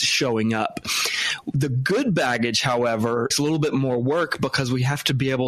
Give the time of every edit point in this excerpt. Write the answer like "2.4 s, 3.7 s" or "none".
3.3 s